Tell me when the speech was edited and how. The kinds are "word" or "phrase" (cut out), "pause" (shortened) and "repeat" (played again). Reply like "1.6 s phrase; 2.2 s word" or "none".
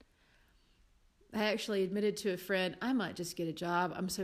none